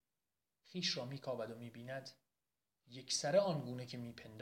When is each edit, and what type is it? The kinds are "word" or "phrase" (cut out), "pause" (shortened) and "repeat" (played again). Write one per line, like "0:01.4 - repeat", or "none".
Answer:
none